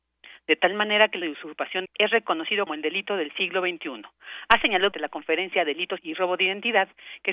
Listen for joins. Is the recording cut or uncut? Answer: cut